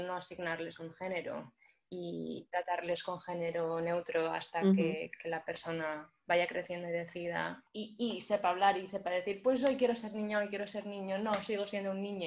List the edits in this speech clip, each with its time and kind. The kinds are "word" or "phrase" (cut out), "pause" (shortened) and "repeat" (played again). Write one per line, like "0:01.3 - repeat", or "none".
none